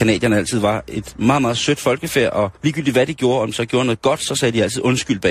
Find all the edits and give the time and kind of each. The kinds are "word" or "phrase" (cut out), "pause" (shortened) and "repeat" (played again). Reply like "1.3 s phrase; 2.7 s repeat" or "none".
2.6 s pause